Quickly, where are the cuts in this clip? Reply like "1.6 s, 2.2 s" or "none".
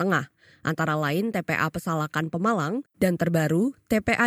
none